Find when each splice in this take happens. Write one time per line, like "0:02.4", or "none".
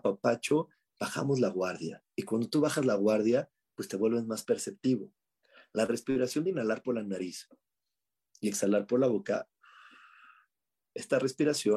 none